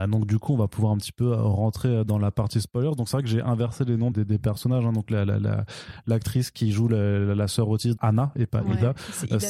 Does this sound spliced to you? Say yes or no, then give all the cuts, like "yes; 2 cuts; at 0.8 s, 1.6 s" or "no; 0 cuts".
yes; 2 cuts; at 4.1 s, 8.0 s